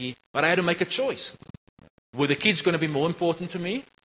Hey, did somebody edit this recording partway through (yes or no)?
no